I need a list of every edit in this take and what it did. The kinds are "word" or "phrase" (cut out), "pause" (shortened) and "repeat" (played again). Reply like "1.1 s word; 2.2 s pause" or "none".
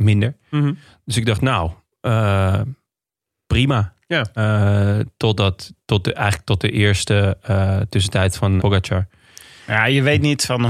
8.6 s word